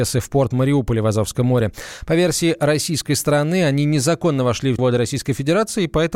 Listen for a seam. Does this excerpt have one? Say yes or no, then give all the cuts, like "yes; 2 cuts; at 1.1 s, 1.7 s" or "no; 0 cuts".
yes; 1 cut; at 4.8 s